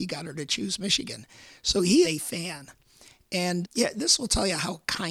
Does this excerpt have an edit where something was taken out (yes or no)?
yes